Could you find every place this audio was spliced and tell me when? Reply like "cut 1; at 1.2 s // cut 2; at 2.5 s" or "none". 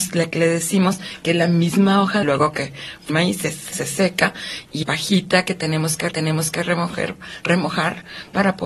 cut 1; at 2.2 s // cut 2; at 3.1 s // cut 3; at 3.7 s // cut 4; at 4.8 s // cut 5; at 6.1 s